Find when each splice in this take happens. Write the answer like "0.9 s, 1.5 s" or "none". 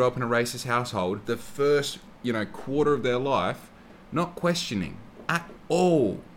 1.2 s, 2.1 s, 4.0 s